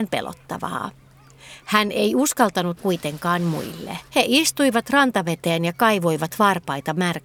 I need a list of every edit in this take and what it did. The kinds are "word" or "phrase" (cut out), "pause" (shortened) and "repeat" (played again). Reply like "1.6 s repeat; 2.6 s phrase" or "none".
2.8 s phrase; 4.1 s pause